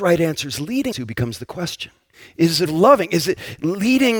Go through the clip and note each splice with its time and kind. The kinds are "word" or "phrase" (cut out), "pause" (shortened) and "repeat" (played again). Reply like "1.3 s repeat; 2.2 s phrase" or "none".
0.9 s word; 2.1 s pause; 2.7 s phrase